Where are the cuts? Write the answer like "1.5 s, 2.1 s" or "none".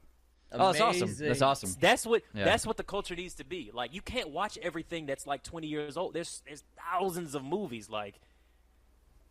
none